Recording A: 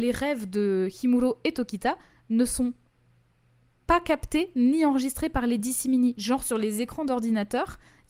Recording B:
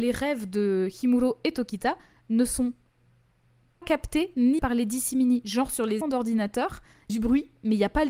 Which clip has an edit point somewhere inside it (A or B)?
B